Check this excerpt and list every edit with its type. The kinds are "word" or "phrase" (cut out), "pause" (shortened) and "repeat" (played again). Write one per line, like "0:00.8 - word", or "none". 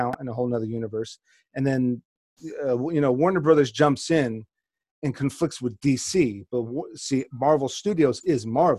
none